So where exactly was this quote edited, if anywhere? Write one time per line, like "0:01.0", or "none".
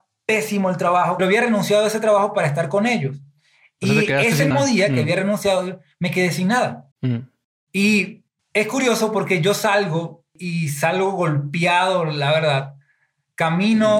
0:01.2
0:04.5
0:06.9